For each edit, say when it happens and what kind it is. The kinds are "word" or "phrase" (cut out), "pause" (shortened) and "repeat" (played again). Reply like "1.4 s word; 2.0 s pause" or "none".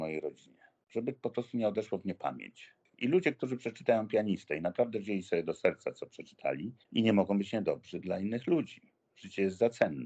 6.8 s pause